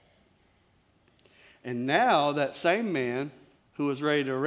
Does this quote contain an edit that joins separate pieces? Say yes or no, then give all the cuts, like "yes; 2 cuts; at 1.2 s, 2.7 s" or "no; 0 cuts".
yes; 1 cut; at 3.6 s